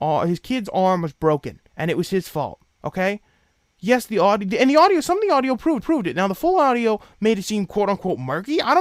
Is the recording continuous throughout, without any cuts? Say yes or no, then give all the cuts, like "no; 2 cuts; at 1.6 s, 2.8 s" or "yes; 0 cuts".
no; 2 cuts; at 1.7 s, 5.8 s